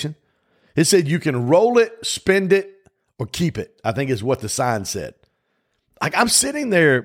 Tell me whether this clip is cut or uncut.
uncut